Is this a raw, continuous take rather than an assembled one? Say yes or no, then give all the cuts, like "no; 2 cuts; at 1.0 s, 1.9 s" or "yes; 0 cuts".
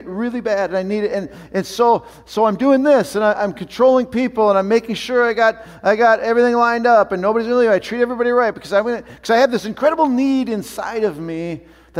yes; 0 cuts